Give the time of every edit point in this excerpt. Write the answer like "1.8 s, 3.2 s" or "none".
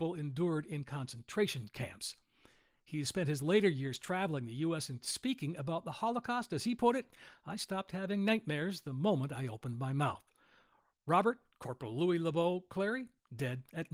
5.0 s